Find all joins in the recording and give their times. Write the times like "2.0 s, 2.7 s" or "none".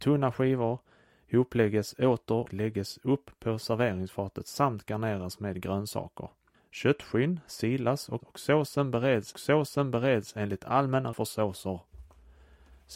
2.5 s, 6.5 s, 8.2 s, 9.3 s, 11.1 s